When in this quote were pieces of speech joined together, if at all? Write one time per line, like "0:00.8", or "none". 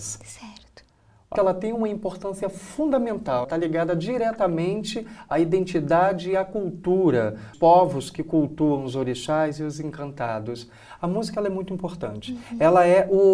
0:01.3
0:03.4
0:07.5